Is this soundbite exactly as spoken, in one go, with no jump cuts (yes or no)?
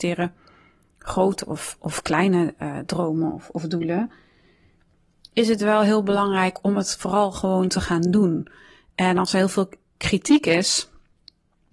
yes